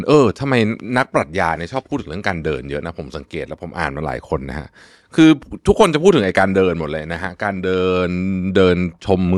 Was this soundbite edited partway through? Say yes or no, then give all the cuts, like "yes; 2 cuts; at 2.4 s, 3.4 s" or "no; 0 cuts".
no; 0 cuts